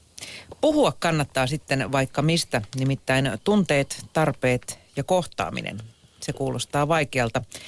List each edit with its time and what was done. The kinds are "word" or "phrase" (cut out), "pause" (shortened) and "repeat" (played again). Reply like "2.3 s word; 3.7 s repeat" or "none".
none

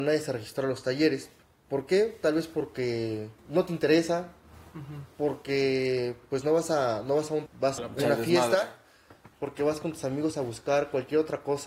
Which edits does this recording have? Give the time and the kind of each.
1.4 s pause; 3.4 s pause; 7.5 s word; 7.8 s word

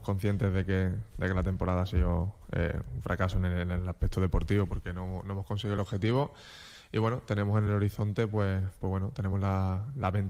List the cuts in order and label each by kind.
none

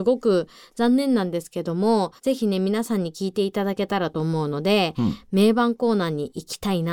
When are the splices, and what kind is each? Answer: 2.2 s pause

